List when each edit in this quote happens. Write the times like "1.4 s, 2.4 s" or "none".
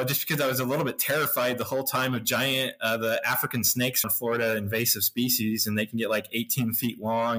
4.0 s